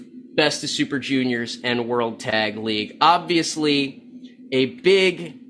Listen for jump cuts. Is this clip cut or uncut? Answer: uncut